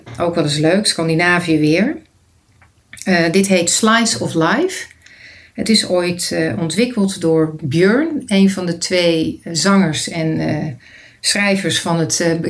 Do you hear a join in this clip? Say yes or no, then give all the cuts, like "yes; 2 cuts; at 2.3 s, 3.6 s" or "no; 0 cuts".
no; 0 cuts